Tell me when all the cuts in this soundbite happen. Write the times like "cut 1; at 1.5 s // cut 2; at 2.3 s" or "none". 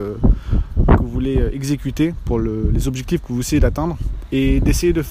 none